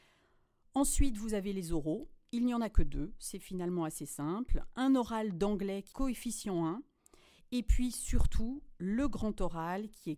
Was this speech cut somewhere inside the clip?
yes; 1 cut; at 5.9 s

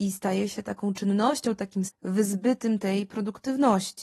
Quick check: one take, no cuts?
no; 1 cut; at 1.9 s

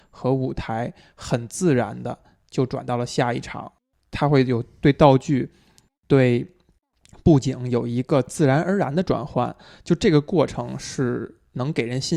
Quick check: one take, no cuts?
yes; 0 cuts

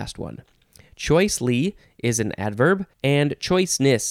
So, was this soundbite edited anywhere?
yes; 1 cut; at 2.9 s

